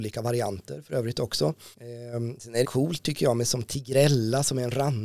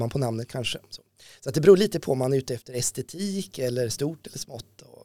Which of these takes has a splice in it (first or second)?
first